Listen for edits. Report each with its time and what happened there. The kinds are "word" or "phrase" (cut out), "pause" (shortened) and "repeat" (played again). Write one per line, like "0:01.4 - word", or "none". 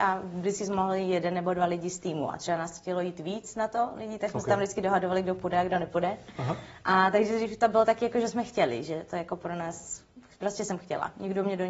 none